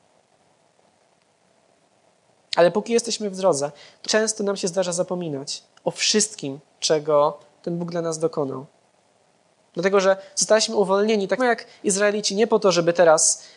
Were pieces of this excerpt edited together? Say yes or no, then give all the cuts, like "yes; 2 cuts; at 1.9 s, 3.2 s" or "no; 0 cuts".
yes; 2 cuts; at 4.0 s, 11.4 s